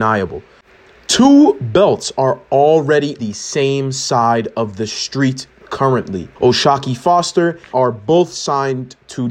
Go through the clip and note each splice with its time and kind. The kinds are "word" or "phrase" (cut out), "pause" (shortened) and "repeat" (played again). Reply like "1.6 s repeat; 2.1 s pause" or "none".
3.2 s word; 6.3 s pause; 7.7 s phrase